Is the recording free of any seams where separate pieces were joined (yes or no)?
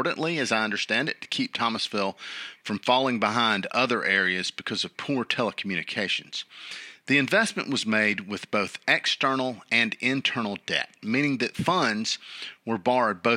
yes